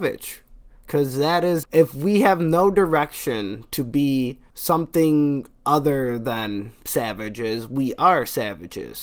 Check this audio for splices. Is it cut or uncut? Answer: cut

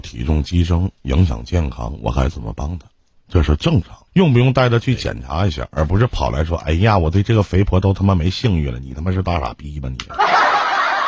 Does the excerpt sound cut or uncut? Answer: cut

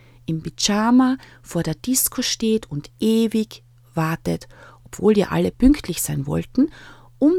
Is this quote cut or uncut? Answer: uncut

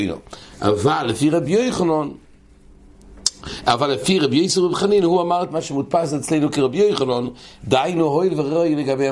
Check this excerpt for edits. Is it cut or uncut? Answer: uncut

